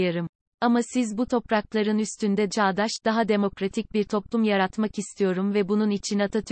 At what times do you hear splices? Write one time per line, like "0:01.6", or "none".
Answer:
0:02.5